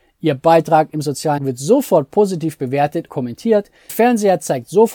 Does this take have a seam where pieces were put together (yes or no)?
yes